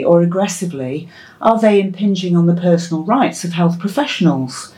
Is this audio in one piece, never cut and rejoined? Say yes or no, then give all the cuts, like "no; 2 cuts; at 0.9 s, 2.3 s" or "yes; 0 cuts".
yes; 0 cuts